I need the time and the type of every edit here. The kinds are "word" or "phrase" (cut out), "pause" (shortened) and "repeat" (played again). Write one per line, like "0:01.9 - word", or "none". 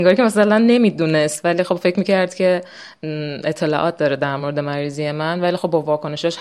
none